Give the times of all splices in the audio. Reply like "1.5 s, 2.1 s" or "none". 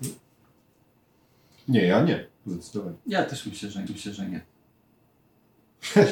3.0 s, 3.9 s